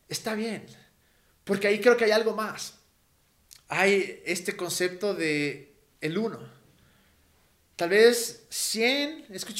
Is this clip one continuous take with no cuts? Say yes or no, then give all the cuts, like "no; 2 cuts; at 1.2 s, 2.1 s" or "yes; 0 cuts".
yes; 0 cuts